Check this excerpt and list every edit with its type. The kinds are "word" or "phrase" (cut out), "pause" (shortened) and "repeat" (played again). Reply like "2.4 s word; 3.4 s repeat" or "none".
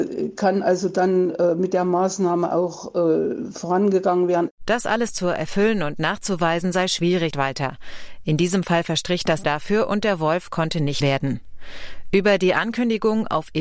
7.3 s word; 9.4 s word; 11.0 s word